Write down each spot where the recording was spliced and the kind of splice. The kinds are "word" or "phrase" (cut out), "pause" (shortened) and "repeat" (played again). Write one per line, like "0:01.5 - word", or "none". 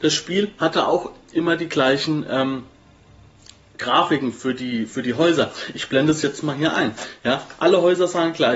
0:01.2 - pause